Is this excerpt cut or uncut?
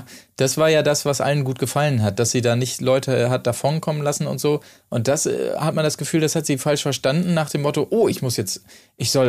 uncut